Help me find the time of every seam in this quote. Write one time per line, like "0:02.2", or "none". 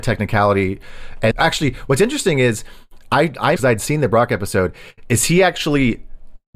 0:01.3
0:03.6